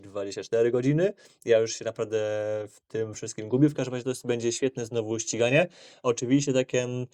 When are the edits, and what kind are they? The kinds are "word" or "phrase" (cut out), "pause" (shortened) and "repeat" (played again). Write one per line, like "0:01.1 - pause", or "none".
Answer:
none